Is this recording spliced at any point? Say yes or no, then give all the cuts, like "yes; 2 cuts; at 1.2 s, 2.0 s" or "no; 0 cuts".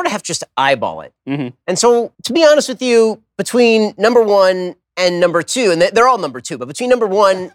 yes; 2 cuts; at 2.1 s, 4.8 s